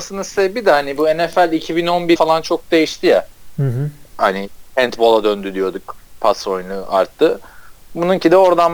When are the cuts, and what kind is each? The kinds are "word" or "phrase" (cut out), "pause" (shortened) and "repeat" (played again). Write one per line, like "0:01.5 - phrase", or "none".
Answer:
0:02.2 - word
0:04.1 - pause